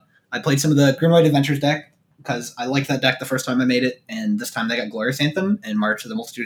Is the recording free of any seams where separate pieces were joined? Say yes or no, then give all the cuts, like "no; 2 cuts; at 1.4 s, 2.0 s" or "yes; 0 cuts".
yes; 0 cuts